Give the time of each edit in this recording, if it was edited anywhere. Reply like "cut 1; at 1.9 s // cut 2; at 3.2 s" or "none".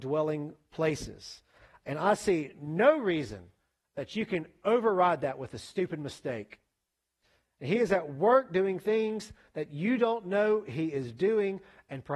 none